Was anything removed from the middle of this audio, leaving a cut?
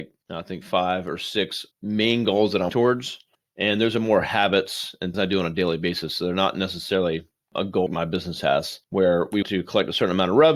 yes; 6 cuts; at 1.7 s, 2.7 s, 5.1 s, 7.9 s, 8.8 s, 9.4 s

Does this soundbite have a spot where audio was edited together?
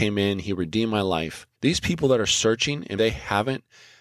yes; 2 cuts; at 1.5 s, 3.0 s

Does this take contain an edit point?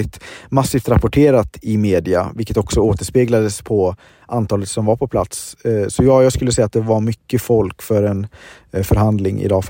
no; 0 cuts

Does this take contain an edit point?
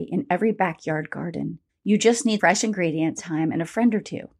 yes; 3 cuts; at 1.7 s, 2.4 s, 3.2 s

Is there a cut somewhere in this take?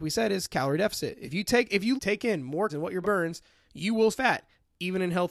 yes; 4 cuts; at 2.0 s, 2.7 s, 3.0 s, 4.1 s

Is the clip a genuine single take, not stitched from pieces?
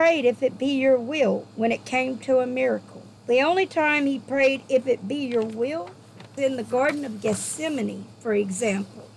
no; 2 cuts; at 3.2 s, 6.4 s

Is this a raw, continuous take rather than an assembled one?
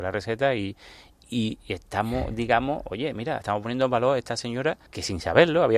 no; 1 cut; at 4.9 s

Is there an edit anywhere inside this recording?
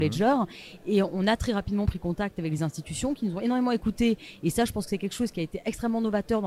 no; 0 cuts

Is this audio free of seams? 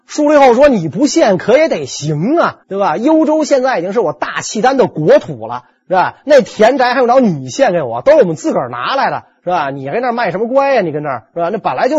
no; 1 cut; at 2.6 s

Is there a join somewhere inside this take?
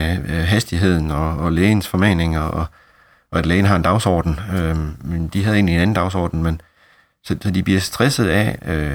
no; 0 cuts

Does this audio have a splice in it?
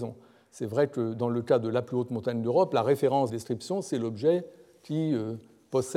yes; 1 cut; at 3.3 s

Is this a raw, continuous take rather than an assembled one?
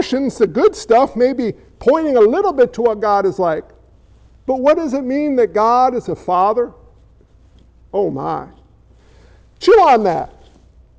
yes; 0 cuts

